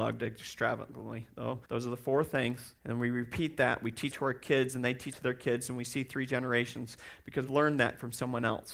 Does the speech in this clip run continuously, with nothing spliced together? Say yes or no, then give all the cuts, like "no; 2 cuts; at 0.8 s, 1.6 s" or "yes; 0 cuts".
no; 5 cuts; at 1.6 s, 2.8 s, 4.1 s, 5.1 s, 7.5 s